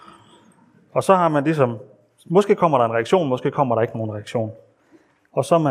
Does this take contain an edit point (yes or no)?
no